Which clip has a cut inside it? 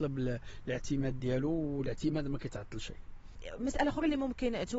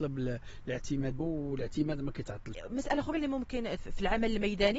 second; 3 cuts; at 1.2 s, 2.5 s, 3.8 s

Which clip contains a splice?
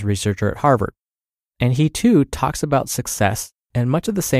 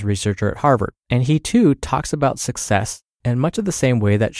second; 1 cut; at 1.0 s

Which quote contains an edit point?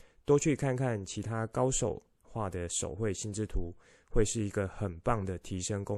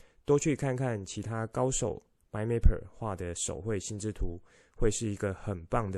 first; 1 cut; at 2.2 s

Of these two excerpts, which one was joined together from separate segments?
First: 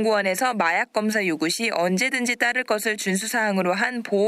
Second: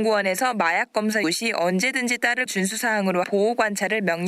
second; 3 cuts; at 1.2 s, 2.5 s, 3.2 s

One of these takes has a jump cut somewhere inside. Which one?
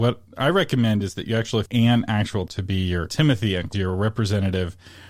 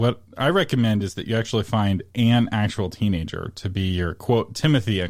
first; 4 cuts; at 1.7 s, 2.5 s, 3.1 s, 3.7 s

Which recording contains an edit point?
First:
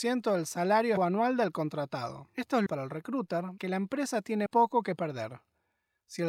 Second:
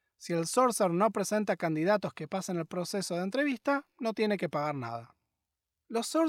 first; 4 cuts; at 1.0 s, 2.7 s, 3.6 s, 4.5 s

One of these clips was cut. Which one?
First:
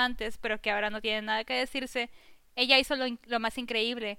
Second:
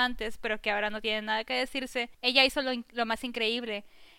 second; 1 cut; at 2.1 s

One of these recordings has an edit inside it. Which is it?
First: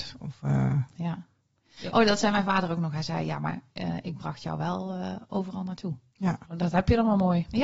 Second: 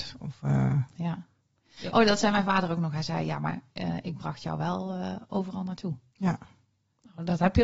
first; 1 cut; at 6.5 s

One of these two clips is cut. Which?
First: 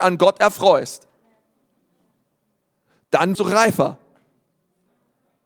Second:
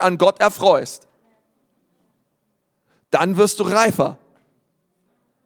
first; 1 cut; at 3.3 s

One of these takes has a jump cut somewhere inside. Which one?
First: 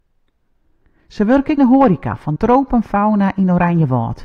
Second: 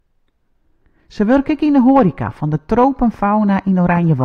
first; 2 cuts; at 1.6 s, 2.4 s

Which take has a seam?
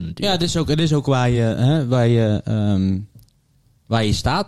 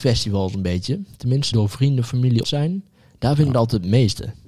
second; 2 cuts; at 1.5 s, 2.4 s

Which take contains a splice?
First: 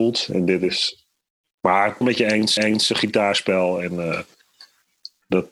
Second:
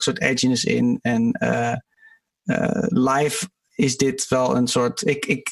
first; 2 cuts; at 2.0 s, 2.6 s

